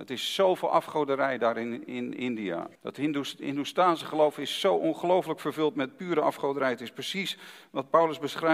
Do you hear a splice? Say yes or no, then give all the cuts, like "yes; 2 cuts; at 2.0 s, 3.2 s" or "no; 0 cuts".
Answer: yes; 1 cut; at 2.7 s